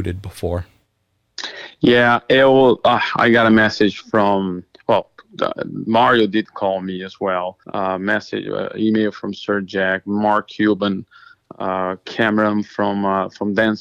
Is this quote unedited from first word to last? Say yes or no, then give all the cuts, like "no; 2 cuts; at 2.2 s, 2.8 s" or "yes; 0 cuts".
no; 1 cut; at 7.6 s